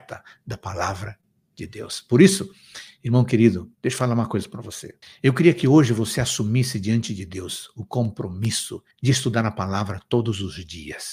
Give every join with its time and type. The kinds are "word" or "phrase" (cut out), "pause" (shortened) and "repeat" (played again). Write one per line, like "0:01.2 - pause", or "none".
0:03.7 - pause
0:05.0 - pause
0:08.9 - pause